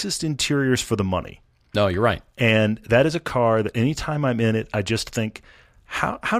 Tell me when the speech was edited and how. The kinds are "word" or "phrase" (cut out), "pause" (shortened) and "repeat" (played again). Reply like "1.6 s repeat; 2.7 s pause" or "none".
none

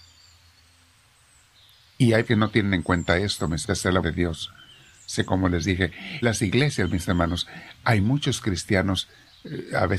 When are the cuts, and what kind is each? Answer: 2.3 s word; 3.6 s word; 4.0 s word; 5.3 s word; 6.2 s word

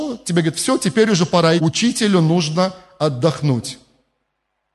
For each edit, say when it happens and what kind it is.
1.6 s word

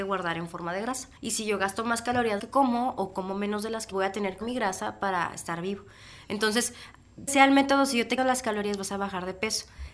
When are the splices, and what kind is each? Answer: 1.2 s pause; 2.4 s phrase; 3.9 s phrase; 4.4 s word; 7.3 s phrase; 8.2 s word

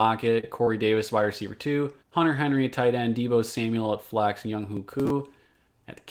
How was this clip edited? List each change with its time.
2.0 s pause

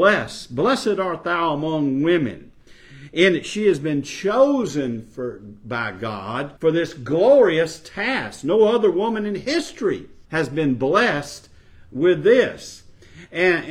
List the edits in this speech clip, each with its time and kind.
6.6 s pause; 10.2 s pause

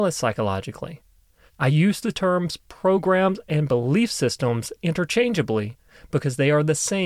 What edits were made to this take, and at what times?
none

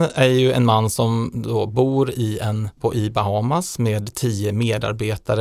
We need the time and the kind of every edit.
2.8 s phrase

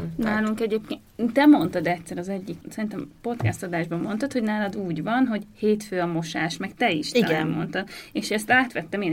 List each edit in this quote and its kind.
2.6 s pause

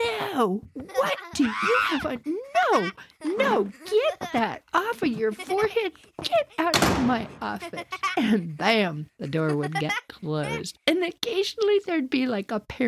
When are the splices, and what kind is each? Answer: none

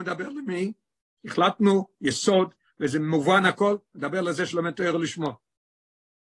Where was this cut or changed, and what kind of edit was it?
none

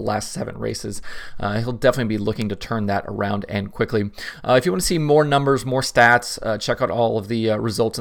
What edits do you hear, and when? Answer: none

